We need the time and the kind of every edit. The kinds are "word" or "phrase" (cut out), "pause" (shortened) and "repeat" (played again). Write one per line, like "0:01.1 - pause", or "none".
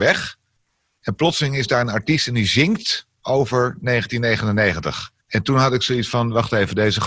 0:05.2 - pause